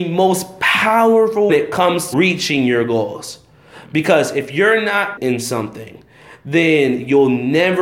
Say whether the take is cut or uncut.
cut